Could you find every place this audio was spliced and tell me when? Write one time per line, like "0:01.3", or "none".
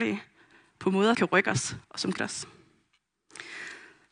0:01.1
0:01.8
0:02.2